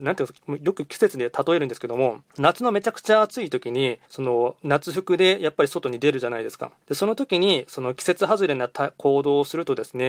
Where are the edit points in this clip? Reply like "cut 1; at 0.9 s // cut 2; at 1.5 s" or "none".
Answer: cut 1; at 2.3 s // cut 2; at 4.1 s // cut 3; at 6.8 s